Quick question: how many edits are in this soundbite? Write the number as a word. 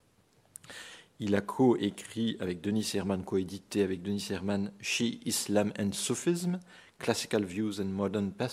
zero